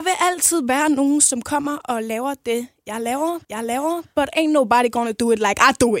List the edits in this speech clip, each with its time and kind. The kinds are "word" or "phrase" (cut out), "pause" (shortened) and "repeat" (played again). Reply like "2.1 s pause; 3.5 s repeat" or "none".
3.4 s repeat